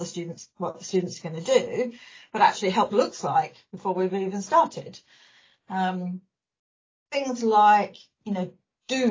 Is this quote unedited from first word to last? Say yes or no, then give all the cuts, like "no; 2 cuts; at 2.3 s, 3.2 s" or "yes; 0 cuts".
no; 1 cut; at 2.9 s